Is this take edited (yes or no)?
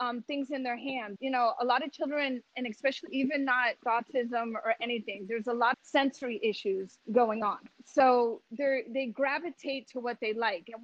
yes